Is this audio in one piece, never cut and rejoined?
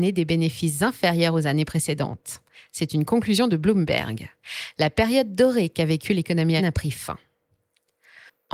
no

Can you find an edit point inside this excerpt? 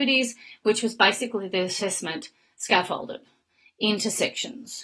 no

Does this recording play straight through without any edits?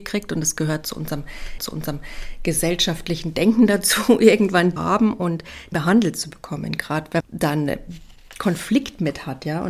no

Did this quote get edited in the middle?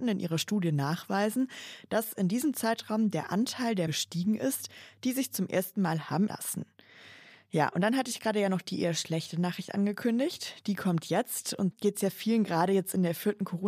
yes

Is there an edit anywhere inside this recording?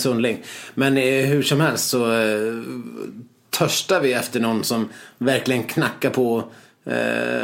no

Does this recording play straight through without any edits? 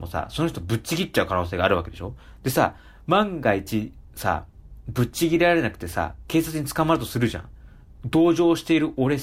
yes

